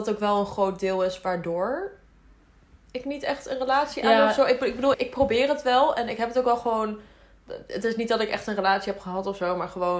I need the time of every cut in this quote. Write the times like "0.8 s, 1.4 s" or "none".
4.9 s